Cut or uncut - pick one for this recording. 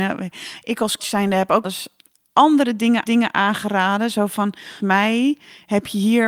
cut